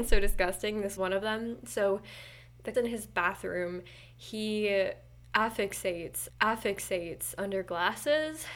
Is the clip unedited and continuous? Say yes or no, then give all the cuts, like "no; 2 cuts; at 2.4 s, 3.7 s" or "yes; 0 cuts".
no; 3 cuts; at 1.0 s, 2.7 s, 6.3 s